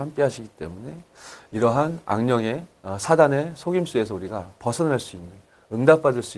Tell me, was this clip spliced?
no; 0 cuts

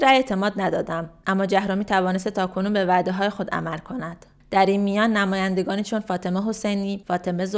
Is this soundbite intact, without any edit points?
yes; 0 cuts

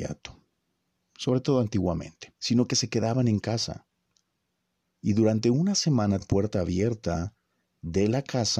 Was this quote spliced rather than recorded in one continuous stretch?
yes; 2 cuts; at 2.4 s, 6.2 s

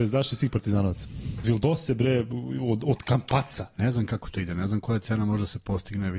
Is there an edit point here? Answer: yes; 1 cut; at 1.4 s

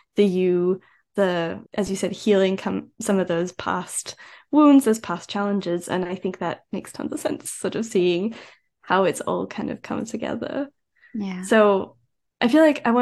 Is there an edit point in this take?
yes; 1 cut; at 1.6 s

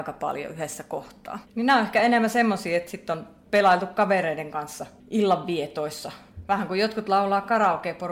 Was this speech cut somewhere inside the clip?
yes; 1 cut; at 1.4 s

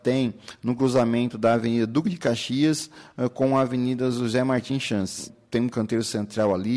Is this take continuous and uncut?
yes; 0 cuts

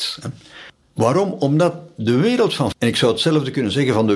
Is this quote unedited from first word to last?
no; 1 cut; at 2.7 s

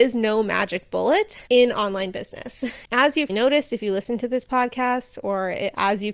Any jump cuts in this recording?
yes; 2 cuts; at 1.5 s, 3.3 s

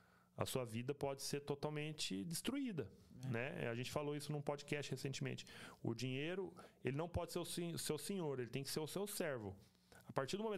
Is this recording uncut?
yes; 0 cuts

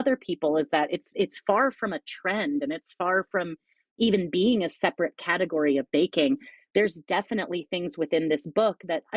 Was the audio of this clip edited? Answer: no; 0 cuts

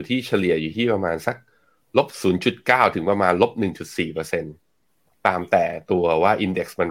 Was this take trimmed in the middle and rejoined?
no; 0 cuts

